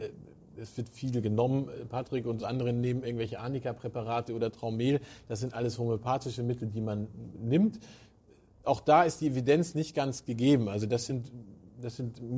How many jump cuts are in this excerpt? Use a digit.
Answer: 0